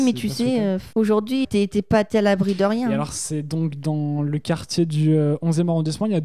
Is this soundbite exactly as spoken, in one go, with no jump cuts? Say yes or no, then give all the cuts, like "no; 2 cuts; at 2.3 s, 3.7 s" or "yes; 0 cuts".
no; 2 cuts; at 0.9 s, 1.4 s